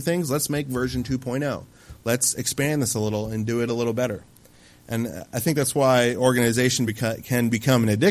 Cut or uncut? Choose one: uncut